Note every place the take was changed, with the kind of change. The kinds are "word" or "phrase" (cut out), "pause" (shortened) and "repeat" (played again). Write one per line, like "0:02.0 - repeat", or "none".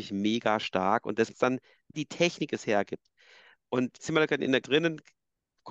0:01.3 - word
0:01.9 - word
0:04.0 - word
0:04.6 - word